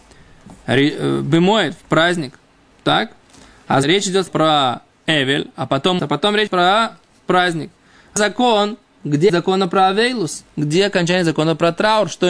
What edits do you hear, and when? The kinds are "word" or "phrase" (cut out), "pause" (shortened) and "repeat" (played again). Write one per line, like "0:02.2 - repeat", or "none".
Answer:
0:03.8 - word
0:04.3 - word
0:06.0 - word
0:06.5 - word
0:08.2 - word
0:09.3 - word